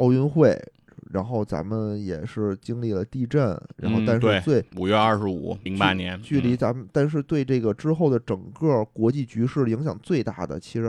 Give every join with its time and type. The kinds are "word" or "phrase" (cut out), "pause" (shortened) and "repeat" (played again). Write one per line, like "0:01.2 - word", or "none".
0:04.7 - pause
0:05.7 - word